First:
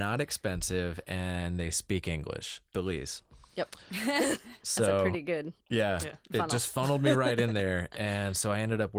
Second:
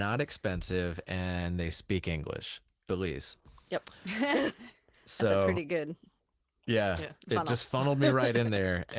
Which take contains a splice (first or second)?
first